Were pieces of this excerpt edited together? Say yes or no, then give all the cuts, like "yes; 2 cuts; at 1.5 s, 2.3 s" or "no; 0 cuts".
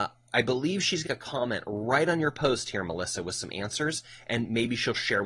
yes; 1 cut; at 1.1 s